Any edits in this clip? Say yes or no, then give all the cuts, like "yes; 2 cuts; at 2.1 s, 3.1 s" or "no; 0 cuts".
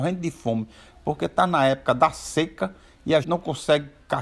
yes; 1 cut; at 3.2 s